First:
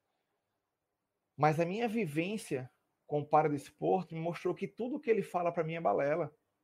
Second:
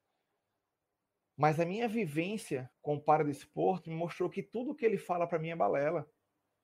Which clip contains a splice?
second; 1 cut; at 2.7 s

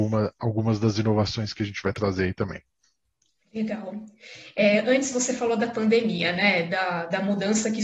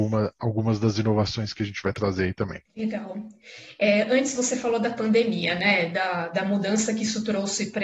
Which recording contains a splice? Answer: second; 1 cut; at 2.7 s

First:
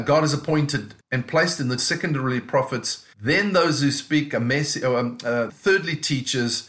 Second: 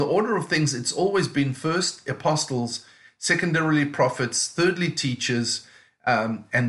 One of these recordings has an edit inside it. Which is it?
first; 4 cuts; at 1.0 s, 1.8 s, 3.1 s, 5.5 s

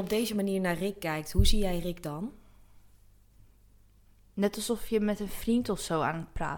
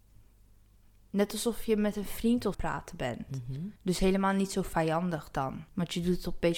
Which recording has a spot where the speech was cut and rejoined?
second; 3 cuts; at 2.5 s, 3.8 s, 5.7 s

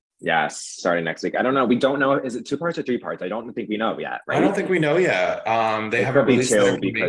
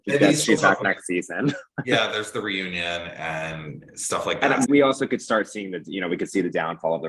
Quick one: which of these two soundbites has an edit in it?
second; 1 cut; at 4.7 s

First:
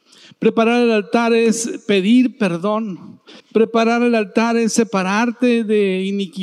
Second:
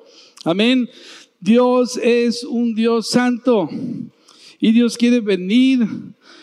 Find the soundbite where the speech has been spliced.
first; 1 cut; at 3.4 s

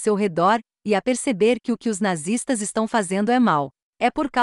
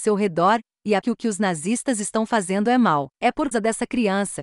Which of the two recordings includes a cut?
second; 3 cuts; at 1.0 s, 3.1 s, 3.5 s

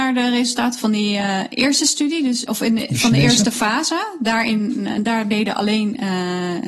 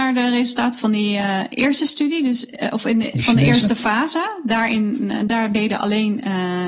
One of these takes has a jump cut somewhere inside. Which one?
first; 1 cut; at 2.5 s

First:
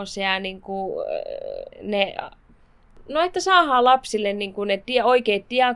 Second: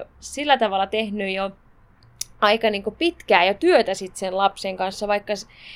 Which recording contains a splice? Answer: first; 1 cut; at 1.7 s

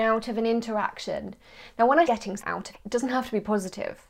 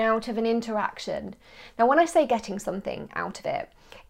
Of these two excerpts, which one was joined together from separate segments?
first; 3 cuts; at 2.1 s, 2.4 s, 2.7 s

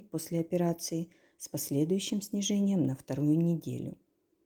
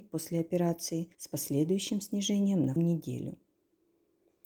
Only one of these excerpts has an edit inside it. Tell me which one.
second; 2 cuts; at 1.1 s, 2.8 s

